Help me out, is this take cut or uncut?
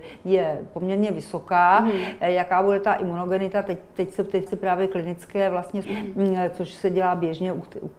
cut